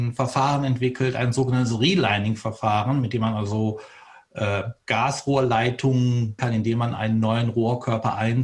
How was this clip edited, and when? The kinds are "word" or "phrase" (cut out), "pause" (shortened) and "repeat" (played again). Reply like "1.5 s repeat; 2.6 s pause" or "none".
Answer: 6.4 s word